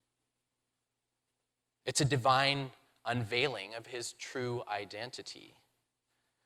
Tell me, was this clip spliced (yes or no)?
no